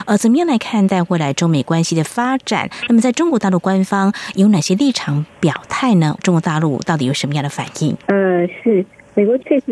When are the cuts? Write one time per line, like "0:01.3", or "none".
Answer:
0:08.0

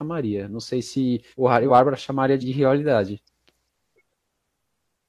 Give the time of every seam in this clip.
0:01.3
0:01.7
0:02.4

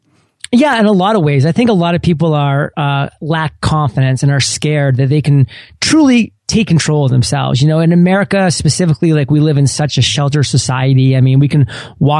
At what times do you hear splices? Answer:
none

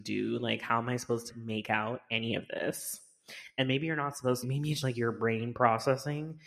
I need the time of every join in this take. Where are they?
0:01.3
0:04.4
0:04.8

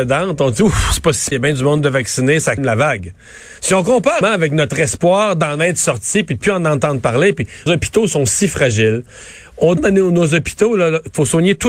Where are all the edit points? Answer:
0:01.3
0:02.6
0:03.6
0:04.2
0:07.7
0:09.8

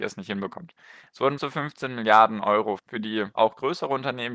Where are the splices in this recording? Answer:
0:01.4
0:02.8
0:03.3

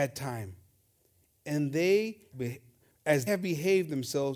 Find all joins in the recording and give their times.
0:02.3
0:03.3

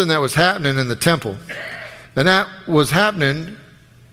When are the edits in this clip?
0:02.0

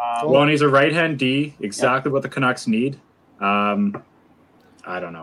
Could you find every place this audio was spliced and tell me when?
none

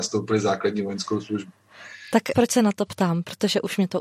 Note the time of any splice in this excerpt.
0:02.3

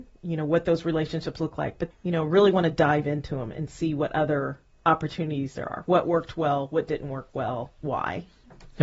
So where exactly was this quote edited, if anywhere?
0:01.9

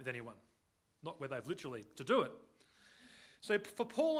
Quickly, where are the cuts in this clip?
0:01.9

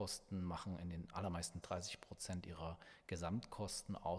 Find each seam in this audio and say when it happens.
0:01.6

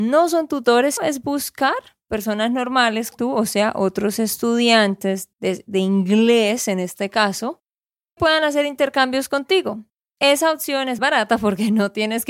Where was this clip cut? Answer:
0:01.0
0:03.1
0:05.3
0:08.2
0:11.0

